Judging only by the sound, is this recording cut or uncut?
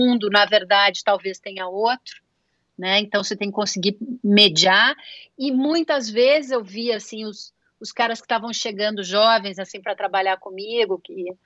uncut